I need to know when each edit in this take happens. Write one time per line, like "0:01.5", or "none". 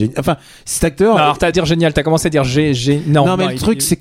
0:01.5